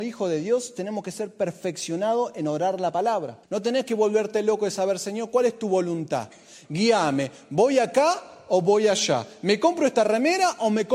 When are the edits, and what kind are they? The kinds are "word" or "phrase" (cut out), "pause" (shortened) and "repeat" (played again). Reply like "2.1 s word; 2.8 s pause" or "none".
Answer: 3.4 s pause